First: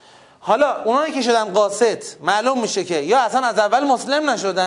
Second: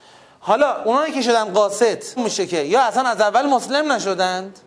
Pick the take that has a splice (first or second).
second